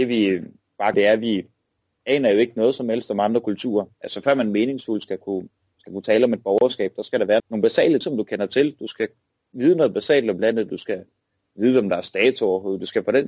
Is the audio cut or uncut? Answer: cut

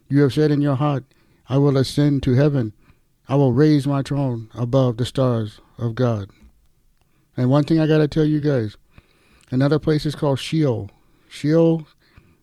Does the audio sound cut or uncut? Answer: uncut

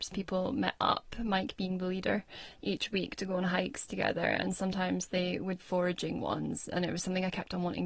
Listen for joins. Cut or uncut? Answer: cut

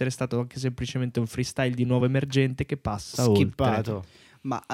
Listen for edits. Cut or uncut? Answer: uncut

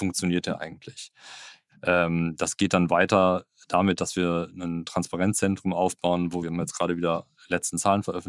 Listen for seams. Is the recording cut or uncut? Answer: cut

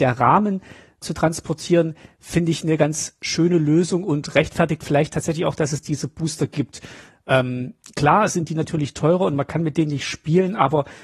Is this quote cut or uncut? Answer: cut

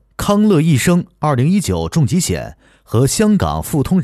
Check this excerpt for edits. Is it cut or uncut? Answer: uncut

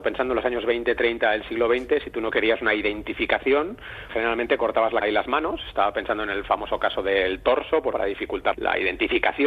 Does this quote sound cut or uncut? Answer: cut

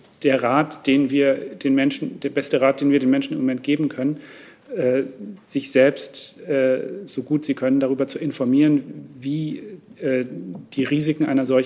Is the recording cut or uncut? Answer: uncut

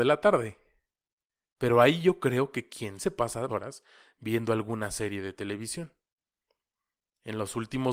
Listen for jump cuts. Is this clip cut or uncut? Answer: cut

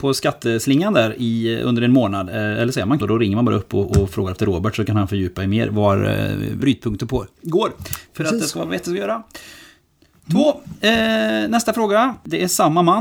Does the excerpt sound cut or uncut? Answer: cut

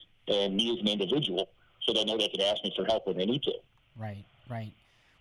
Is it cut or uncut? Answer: uncut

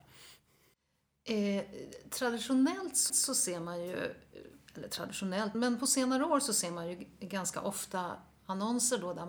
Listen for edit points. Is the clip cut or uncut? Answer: cut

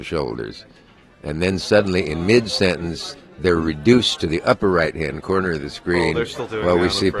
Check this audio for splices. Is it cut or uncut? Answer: uncut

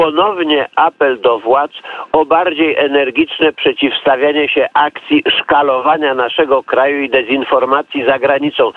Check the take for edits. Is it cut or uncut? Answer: uncut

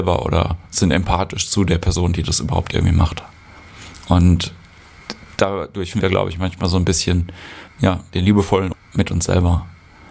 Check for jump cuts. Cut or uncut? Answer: cut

